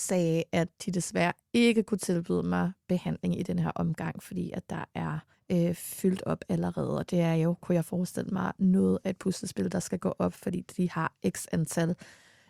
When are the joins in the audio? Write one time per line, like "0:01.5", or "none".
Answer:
0:05.3

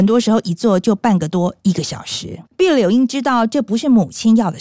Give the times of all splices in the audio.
0:02.5

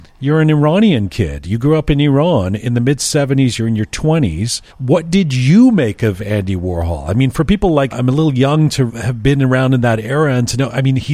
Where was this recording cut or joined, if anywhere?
0:04.7
0:07.9
0:08.9

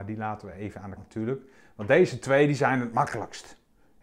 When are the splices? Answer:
0:01.0

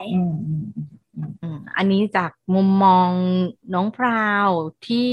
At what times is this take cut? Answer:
0:01.4

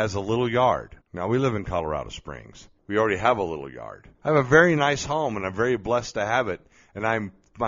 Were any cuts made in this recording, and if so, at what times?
0:01.0
0:02.8
0:04.1

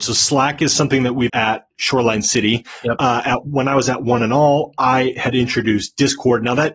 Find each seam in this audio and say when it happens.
0:01.3

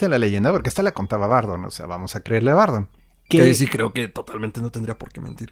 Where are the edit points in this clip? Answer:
0:02.9

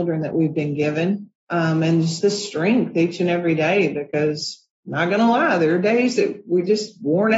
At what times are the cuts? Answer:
0:01.4
0:04.7

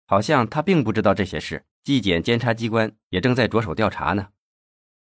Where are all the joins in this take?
0:01.7

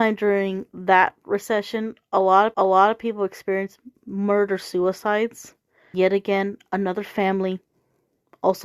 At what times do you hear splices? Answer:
0:02.5
0:04.0
0:05.9

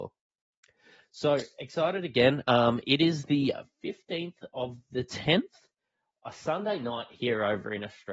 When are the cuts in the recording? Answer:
none

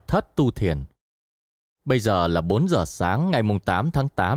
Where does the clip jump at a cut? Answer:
none

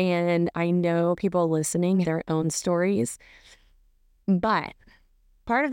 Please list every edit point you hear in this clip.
0:02.0

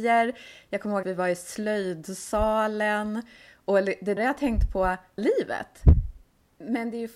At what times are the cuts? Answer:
0:01.0
0:04.2
0:05.2

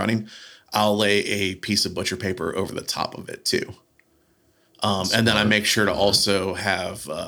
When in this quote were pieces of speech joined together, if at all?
none

